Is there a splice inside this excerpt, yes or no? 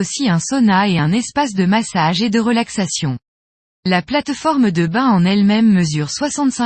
no